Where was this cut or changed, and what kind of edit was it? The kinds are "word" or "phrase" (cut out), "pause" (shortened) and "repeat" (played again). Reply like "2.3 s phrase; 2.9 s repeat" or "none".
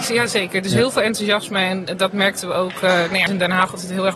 3.3 s phrase